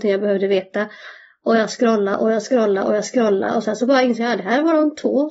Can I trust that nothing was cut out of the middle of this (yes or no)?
yes